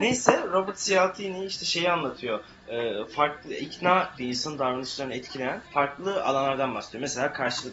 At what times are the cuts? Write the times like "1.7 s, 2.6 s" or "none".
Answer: 4.2 s, 5.7 s